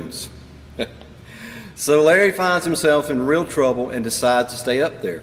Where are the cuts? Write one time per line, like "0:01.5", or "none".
none